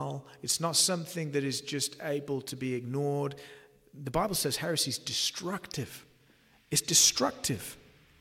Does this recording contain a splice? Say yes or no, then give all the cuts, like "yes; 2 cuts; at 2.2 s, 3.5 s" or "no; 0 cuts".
no; 0 cuts